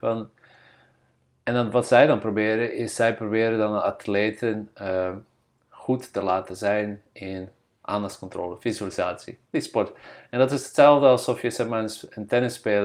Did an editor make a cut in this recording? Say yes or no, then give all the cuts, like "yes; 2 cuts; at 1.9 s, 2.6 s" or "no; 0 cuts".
yes; 1 cut; at 9.4 s